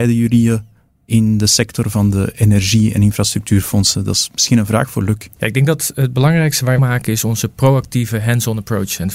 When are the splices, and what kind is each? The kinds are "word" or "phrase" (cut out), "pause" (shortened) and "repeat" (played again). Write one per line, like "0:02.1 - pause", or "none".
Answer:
0:06.8 - phrase